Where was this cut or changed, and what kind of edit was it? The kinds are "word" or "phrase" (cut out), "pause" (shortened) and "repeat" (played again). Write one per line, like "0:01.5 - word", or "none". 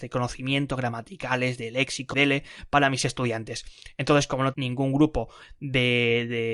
0:02.1 - word
0:04.5 - word

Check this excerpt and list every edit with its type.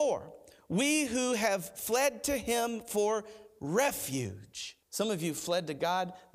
0:04.8 - pause

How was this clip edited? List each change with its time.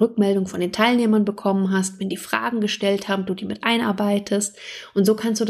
none

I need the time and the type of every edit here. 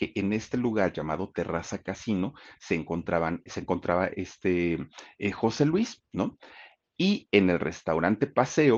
0:03.5 - word

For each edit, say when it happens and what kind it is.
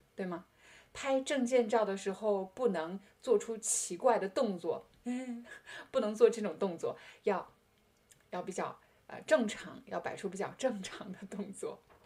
none

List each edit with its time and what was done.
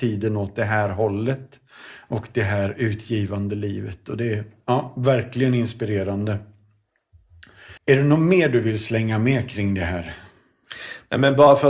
0:07.8 - pause

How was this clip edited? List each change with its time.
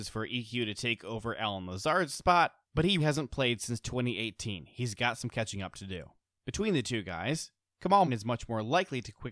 0:02.6 - pause
0:03.0 - word
0:08.0 - word

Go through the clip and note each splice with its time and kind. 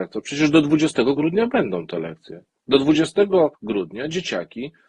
0:03.5 - pause

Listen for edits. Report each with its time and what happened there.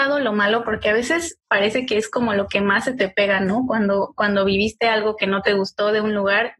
none

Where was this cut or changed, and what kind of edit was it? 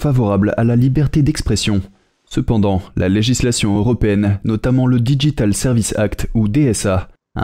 none

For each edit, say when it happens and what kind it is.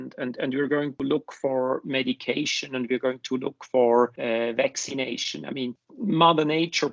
0:00.9 - word

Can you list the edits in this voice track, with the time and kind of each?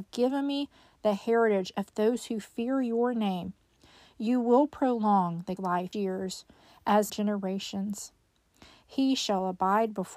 0:05.6 - word
0:05.9 - word
0:07.1 - word

